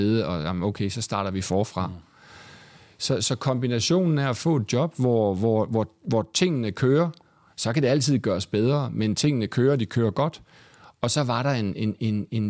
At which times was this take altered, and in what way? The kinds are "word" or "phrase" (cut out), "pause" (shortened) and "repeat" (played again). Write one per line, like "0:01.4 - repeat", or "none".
none